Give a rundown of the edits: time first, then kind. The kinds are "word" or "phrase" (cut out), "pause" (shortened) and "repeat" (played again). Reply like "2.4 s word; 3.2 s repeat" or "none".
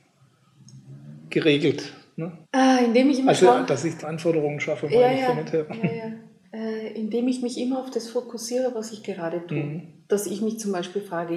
2.4 s pause; 4.0 s word; 6.4 s pause